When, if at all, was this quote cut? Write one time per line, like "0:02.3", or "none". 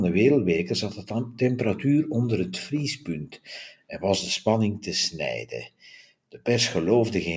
none